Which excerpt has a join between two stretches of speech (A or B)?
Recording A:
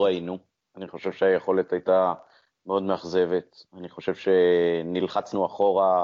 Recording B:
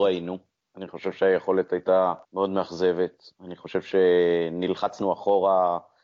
B